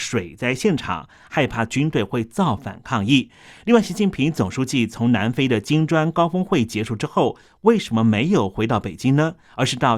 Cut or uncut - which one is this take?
uncut